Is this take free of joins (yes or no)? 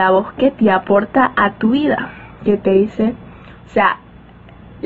yes